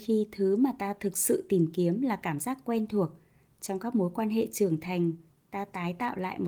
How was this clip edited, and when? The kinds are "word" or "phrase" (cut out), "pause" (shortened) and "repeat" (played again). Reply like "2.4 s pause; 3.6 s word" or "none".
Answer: none